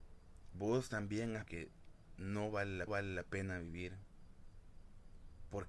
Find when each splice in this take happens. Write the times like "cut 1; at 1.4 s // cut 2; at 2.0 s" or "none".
cut 1; at 1.5 s // cut 2; at 2.9 s